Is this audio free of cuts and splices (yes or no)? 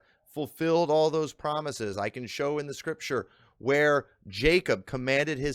yes